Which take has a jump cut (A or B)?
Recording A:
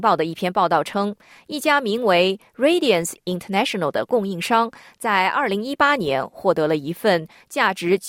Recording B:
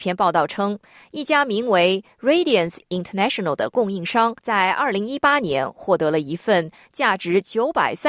B